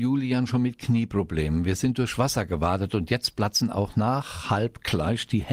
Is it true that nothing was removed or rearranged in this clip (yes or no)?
yes